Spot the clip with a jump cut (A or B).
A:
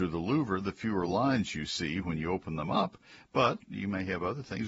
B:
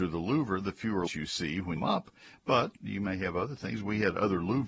B